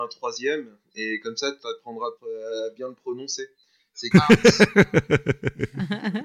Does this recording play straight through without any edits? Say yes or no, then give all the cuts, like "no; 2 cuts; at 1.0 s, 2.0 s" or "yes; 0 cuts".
no; 2 cuts; at 2.2 s, 4.1 s